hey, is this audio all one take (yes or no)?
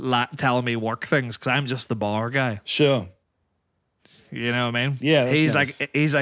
yes